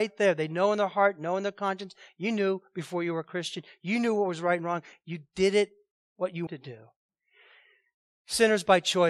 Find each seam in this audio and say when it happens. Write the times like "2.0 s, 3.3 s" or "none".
6.5 s